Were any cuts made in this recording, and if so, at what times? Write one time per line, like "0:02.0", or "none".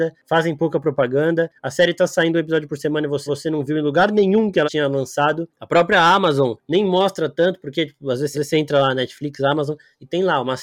0:03.3
0:04.6
0:08.3